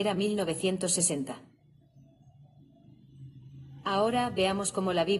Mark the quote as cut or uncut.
uncut